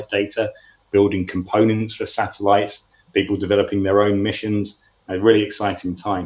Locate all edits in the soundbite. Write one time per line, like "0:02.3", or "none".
none